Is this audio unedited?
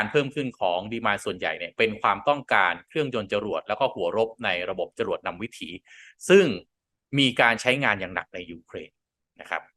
yes; 0 cuts

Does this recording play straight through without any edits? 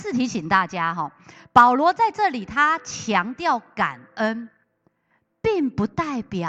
yes; 0 cuts

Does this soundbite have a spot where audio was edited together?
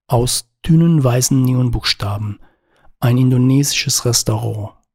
no; 0 cuts

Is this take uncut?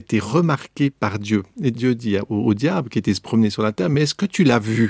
yes; 0 cuts

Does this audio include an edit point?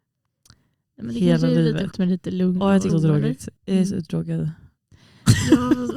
yes; 3 cuts; at 1.9 s, 2.9 s, 3.6 s

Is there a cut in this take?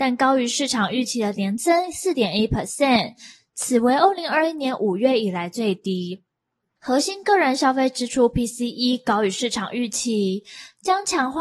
no; 0 cuts

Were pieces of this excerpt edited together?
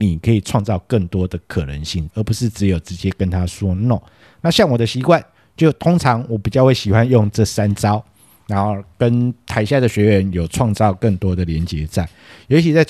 yes; 1 cut; at 2.1 s

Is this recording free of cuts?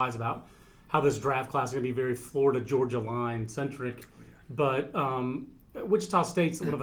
yes; 0 cuts

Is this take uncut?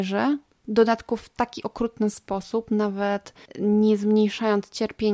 no; 1 cut; at 3.4 s

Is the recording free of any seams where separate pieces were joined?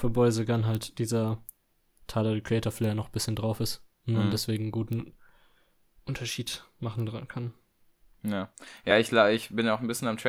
yes; 0 cuts

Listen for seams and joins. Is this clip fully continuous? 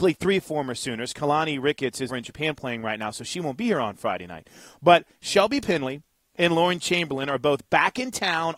no; 1 cut; at 2.1 s

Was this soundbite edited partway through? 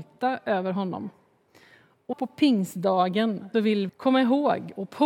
yes; 3 cuts; at 2.1 s, 3.5 s, 3.9 s

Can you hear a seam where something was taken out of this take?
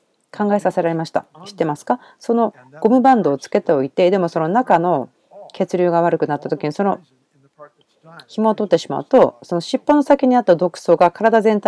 yes; 1 cut; at 1.3 s

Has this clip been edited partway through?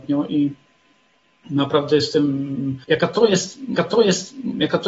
yes; 2 cuts; at 2.8 s, 3.8 s

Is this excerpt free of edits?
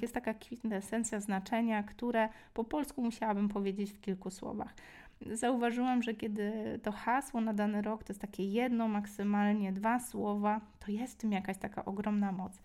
yes; 0 cuts

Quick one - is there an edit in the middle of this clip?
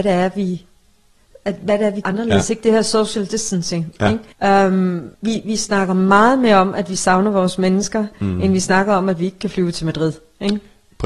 yes; 3 cuts; at 2.0 s, 4.3 s, 5.1 s

